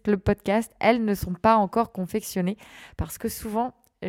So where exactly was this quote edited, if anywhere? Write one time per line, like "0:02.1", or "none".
none